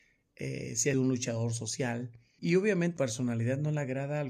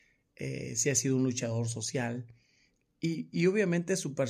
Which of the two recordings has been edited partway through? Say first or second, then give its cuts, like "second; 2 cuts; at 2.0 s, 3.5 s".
first; 3 cuts; at 0.9 s, 2.4 s, 3.0 s